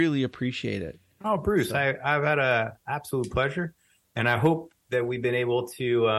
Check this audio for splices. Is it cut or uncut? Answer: uncut